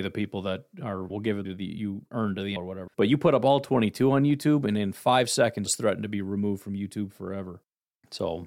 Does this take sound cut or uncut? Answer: cut